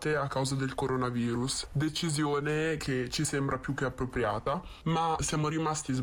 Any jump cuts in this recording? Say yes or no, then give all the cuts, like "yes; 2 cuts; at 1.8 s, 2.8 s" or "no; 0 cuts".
no; 0 cuts